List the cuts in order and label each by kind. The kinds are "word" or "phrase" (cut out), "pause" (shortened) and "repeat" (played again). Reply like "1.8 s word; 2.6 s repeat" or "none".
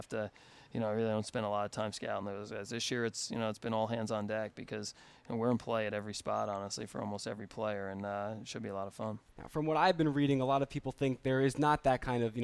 9.3 s pause